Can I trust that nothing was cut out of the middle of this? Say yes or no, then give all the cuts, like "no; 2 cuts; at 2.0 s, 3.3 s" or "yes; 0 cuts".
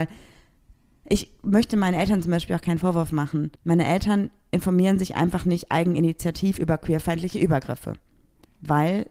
no; 1 cut; at 3.6 s